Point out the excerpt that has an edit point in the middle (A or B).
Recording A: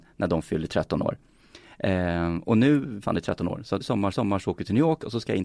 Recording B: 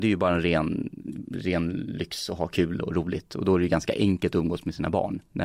A